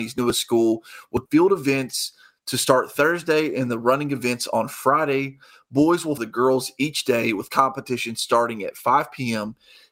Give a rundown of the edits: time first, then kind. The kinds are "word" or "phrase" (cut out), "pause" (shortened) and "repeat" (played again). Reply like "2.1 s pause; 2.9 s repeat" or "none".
1.3 s word; 6.2 s word